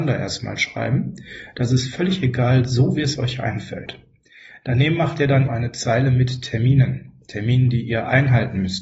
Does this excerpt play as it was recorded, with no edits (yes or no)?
no